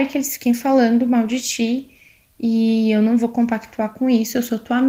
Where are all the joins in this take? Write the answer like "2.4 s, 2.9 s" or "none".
none